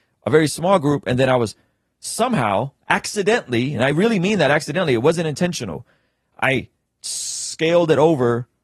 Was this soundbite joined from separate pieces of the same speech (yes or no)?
no